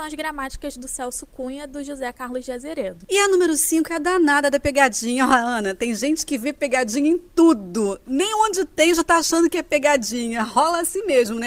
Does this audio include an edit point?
no; 0 cuts

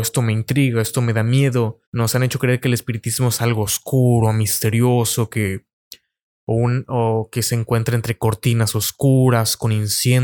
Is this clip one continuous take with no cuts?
no; 1 cut; at 1.9 s

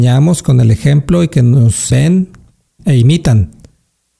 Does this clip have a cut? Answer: yes; 2 cuts; at 1.9 s, 2.8 s

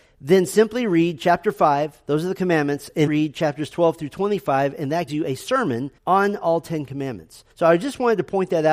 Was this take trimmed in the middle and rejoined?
yes; 4 cuts; at 3.1 s, 5.1 s, 6.0 s, 7.5 s

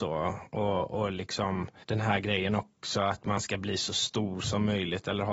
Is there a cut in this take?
no; 0 cuts

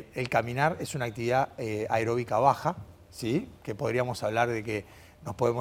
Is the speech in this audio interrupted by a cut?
no; 0 cuts

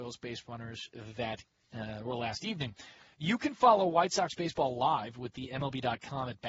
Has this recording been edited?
no; 0 cuts

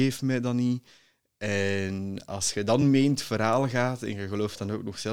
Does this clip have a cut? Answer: no; 0 cuts

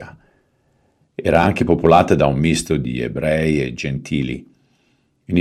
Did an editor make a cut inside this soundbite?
no; 0 cuts

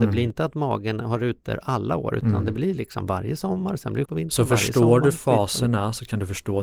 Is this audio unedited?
no; 1 cut; at 4.1 s

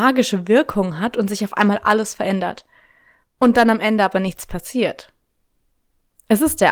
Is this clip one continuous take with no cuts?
yes; 0 cuts

